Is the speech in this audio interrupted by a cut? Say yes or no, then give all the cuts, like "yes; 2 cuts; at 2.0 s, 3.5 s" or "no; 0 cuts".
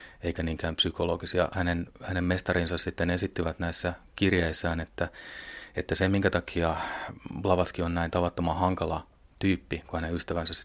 no; 0 cuts